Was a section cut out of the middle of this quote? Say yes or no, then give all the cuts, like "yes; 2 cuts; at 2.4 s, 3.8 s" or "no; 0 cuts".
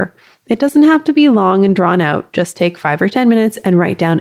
no; 0 cuts